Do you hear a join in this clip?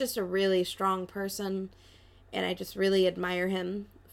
no; 0 cuts

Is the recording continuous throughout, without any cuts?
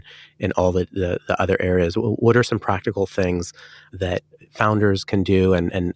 yes; 0 cuts

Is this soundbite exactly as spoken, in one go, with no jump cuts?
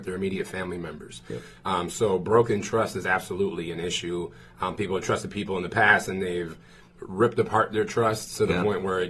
yes; 0 cuts

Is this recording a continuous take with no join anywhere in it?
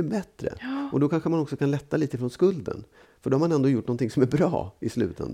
yes; 0 cuts

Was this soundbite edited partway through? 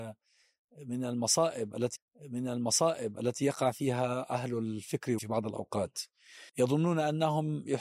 yes; 3 cuts; at 2.0 s, 5.2 s, 6.5 s

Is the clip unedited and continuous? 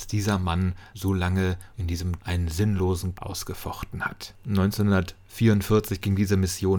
no; 4 cuts; at 0.9 s, 1.7 s, 2.2 s, 3.1 s

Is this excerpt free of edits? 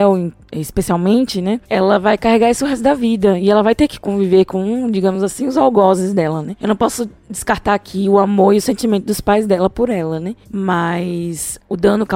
yes; 0 cuts

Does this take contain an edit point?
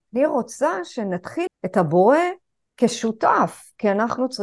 yes; 1 cut; at 1.5 s

